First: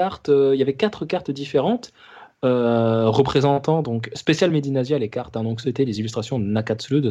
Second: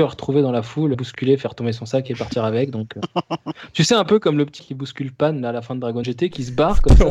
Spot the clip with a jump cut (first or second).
second